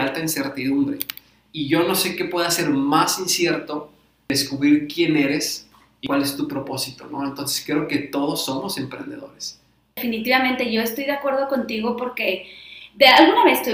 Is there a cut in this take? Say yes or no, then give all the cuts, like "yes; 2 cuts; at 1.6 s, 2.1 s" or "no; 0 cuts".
no; 0 cuts